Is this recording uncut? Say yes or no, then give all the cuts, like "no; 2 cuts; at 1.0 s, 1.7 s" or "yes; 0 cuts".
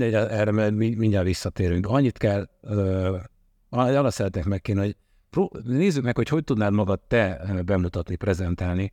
yes; 0 cuts